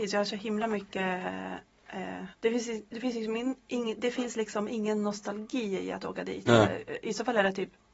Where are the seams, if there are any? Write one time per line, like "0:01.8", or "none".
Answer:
0:02.3